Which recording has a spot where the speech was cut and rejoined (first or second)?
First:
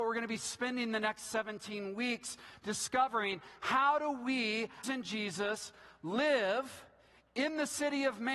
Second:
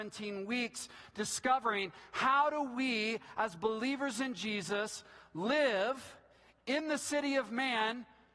first